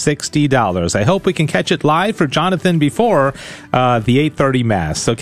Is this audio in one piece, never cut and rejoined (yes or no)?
yes